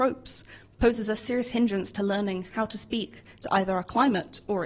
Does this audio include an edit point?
no; 0 cuts

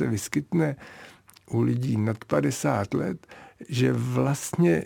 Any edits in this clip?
no; 0 cuts

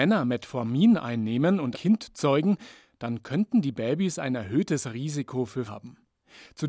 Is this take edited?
yes; 2 cuts; at 1.7 s, 5.7 s

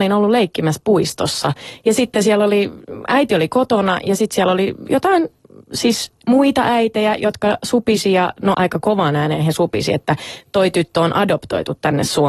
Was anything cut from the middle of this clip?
yes; 2 cuts; at 6.2 s, 8.5 s

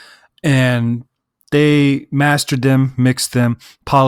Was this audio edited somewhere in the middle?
no; 0 cuts

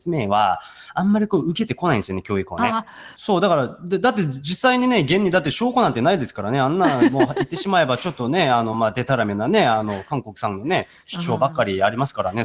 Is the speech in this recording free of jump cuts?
yes; 0 cuts

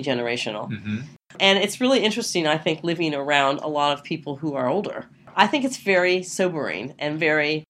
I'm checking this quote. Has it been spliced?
no; 0 cuts

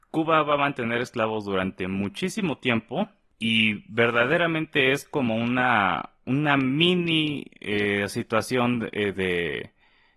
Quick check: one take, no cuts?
yes; 0 cuts

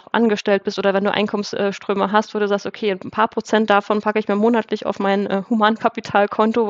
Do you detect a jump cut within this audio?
no; 0 cuts

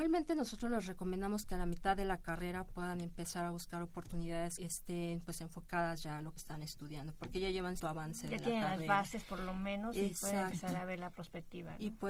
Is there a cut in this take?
yes; 3 cuts; at 4.6 s, 6.4 s, 7.8 s

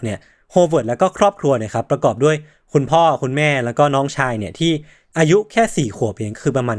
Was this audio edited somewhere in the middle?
no; 0 cuts

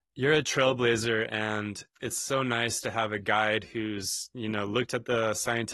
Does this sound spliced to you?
no; 0 cuts

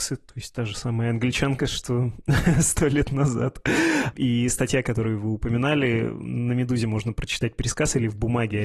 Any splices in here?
no; 0 cuts

